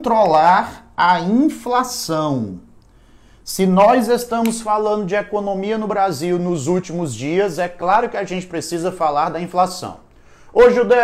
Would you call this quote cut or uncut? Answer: uncut